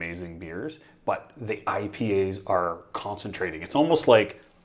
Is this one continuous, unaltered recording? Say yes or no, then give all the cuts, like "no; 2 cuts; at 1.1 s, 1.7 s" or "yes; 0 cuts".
yes; 0 cuts